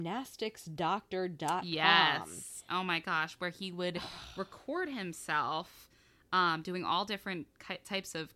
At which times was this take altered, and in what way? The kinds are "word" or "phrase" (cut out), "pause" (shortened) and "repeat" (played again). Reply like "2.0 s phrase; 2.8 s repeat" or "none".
none